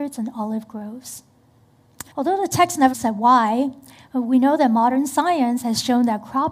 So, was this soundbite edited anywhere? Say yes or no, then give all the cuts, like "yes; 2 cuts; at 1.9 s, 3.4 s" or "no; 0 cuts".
yes; 2 cuts; at 2.1 s, 2.9 s